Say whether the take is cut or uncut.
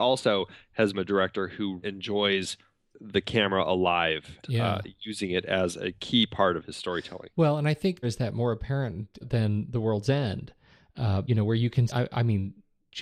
cut